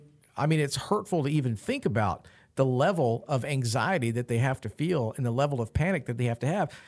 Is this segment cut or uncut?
uncut